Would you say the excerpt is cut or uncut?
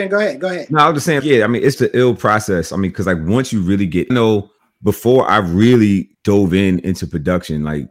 cut